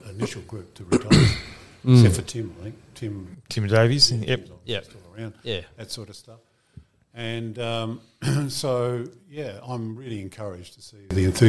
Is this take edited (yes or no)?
no